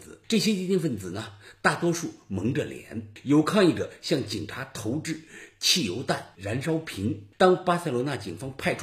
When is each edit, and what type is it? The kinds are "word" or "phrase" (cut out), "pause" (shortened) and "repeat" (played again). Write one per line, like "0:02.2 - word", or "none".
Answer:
0:06.4 - phrase

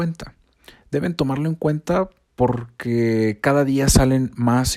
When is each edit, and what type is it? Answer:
0:02.2 - word

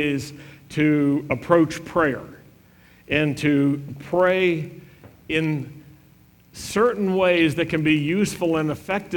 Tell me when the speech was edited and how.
none

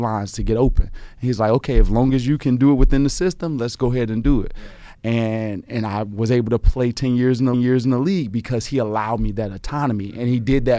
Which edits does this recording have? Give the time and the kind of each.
0:07.5 - repeat

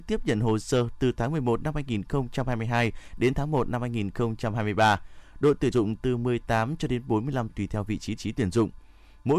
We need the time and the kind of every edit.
0:05.7 - word
0:07.5 - word
0:08.2 - repeat

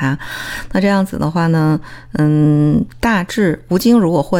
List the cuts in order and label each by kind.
none

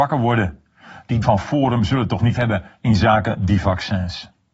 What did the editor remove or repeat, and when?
0:01.2 - word
0:02.4 - word

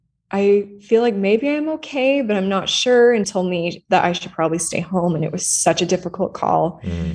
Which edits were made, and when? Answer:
0:03.2 - word

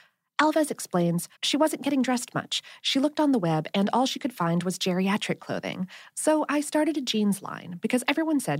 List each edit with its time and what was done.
0:01.3 - pause

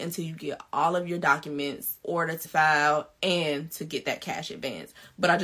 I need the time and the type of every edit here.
0:02.0 - word
0:02.4 - word

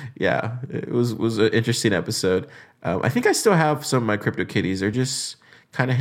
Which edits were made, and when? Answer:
none

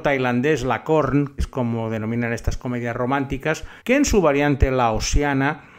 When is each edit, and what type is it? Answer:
0:01.4 - word
0:03.8 - pause

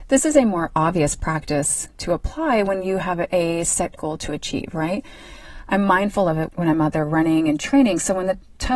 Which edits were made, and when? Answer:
0:04.0 - word

